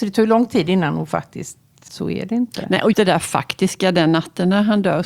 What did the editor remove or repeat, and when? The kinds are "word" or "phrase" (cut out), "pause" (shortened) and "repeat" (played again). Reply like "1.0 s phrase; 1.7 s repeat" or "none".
1.9 s phrase; 2.9 s word